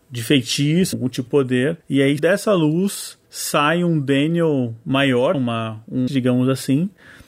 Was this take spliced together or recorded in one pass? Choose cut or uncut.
cut